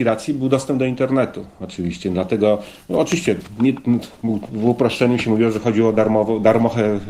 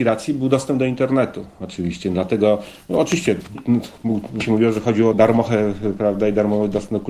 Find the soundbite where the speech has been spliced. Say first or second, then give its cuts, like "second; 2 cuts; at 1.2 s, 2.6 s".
second; 3 cuts; at 3.5 s, 4.4 s, 5.1 s